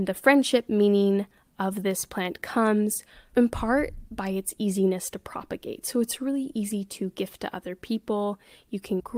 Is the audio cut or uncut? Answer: uncut